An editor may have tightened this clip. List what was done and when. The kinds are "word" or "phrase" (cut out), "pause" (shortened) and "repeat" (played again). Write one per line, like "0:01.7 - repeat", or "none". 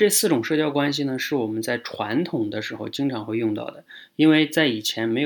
none